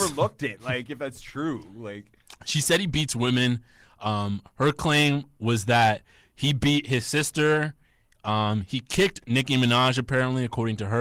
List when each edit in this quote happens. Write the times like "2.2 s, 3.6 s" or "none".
none

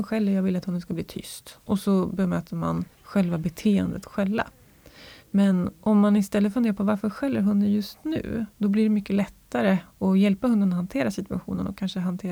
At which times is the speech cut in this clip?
2.9 s, 5.2 s, 8.5 s

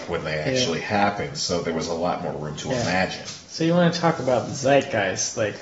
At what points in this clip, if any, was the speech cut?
none

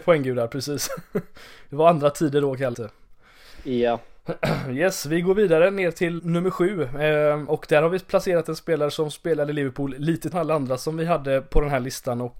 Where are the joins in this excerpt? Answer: 2.7 s, 6.2 s, 10.3 s

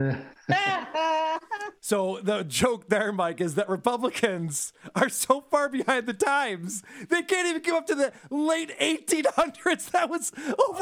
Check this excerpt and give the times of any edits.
none

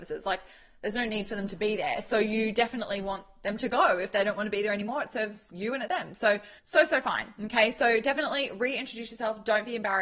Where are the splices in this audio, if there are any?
5.9 s, 6.6 s

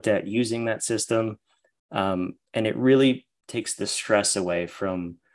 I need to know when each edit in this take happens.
none

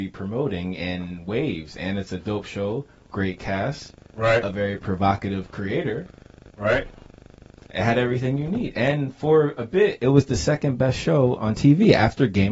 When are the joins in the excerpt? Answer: none

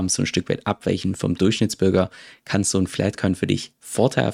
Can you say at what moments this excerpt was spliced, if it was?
none

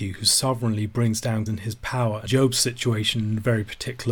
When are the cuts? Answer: 1.5 s, 2.3 s

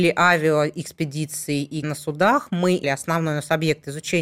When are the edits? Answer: 1.8 s, 2.8 s

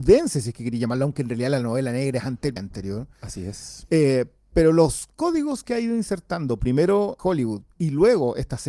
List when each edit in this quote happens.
2.6 s, 7.2 s

